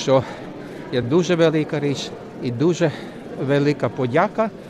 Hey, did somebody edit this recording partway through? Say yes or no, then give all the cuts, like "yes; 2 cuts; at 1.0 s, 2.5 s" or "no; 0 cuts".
no; 0 cuts